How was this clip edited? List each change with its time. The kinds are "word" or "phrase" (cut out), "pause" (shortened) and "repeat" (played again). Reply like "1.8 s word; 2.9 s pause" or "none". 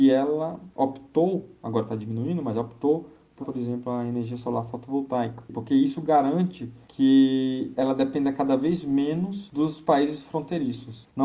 3.4 s word